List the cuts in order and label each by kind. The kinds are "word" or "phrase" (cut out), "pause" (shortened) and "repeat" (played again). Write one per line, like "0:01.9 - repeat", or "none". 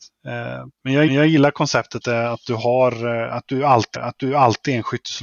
0:01.1 - repeat
0:02.0 - word
0:03.9 - repeat